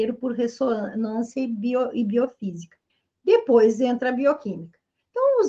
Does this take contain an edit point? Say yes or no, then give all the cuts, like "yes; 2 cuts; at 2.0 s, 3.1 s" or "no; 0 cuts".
yes; 1 cut; at 2.9 s